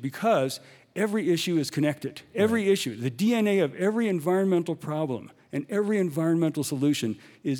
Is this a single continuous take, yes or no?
yes